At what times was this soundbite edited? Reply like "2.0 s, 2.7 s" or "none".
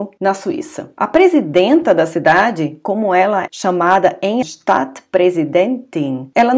3.5 s, 4.4 s